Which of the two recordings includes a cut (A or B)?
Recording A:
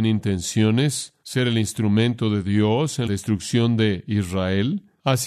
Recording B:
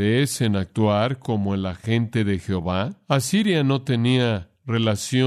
A